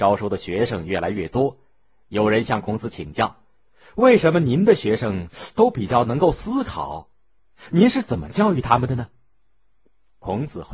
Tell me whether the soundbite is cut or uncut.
uncut